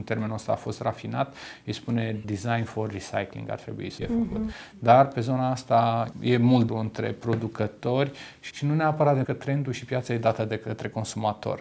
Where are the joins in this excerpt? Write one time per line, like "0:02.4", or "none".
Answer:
0:02.2
0:04.0
0:06.1
0:06.7
0:08.5
0:09.2